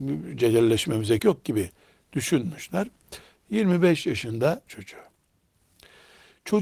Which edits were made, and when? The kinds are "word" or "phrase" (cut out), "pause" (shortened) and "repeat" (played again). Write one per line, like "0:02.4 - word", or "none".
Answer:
0:01.2 - word
0:04.7 - word